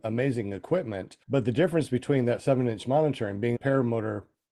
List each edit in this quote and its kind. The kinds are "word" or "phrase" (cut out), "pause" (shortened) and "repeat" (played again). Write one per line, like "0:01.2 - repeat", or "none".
0:01.2 - pause
0:03.6 - phrase